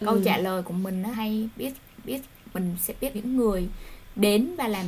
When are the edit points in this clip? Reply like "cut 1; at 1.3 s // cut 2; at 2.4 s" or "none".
cut 1; at 1.1 s // cut 2; at 2.0 s // cut 3; at 3.1 s